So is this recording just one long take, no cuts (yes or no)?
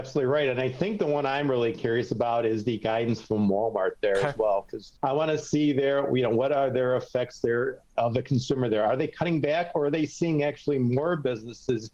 no